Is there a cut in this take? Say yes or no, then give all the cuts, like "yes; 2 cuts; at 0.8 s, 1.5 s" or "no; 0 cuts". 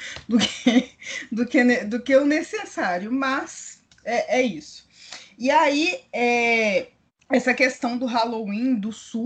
yes; 1 cut; at 7.1 s